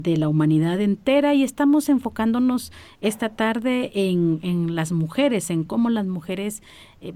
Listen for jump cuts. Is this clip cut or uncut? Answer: uncut